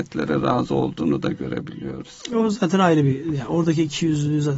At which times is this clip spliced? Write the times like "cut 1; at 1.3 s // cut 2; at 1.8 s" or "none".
none